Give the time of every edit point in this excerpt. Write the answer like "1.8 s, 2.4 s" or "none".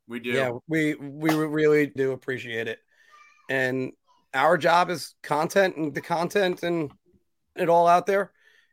2.0 s, 5.9 s, 7.6 s

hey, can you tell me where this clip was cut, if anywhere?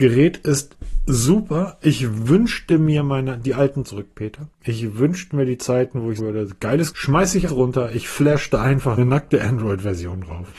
3.8 s, 4.5 s, 6.2 s, 6.9 s, 7.5 s, 9.0 s

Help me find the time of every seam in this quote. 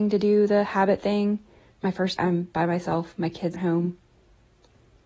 1.8 s, 2.2 s, 3.5 s

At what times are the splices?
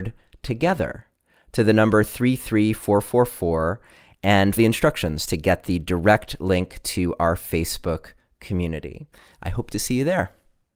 4.6 s

